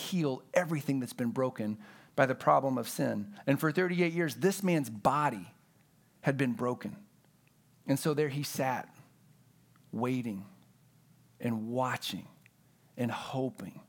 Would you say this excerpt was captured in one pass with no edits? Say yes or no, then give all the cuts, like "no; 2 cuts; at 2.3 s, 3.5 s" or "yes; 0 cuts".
yes; 0 cuts